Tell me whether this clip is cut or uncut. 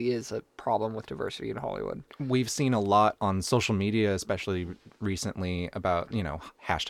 uncut